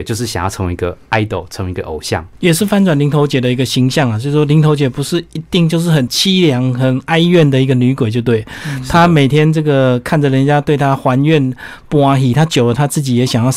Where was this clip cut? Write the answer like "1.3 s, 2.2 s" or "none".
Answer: none